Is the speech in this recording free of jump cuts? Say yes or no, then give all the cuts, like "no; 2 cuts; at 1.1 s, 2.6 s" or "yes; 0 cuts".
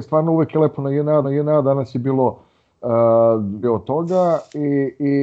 no; 2 cuts; at 1.2 s, 3.6 s